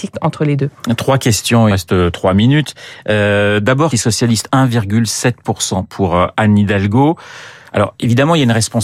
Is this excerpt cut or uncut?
cut